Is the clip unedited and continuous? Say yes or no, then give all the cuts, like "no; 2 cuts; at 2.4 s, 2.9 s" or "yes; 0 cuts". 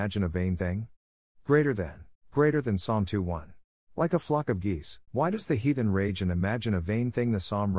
no; 3 cuts; at 2.1 s, 3.8 s, 5.1 s